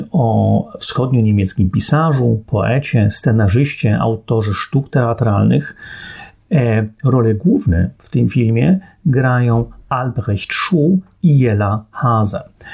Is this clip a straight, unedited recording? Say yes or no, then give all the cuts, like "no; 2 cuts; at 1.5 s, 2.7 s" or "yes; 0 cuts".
yes; 0 cuts